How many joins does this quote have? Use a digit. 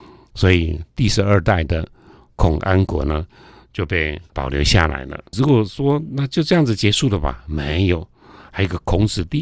1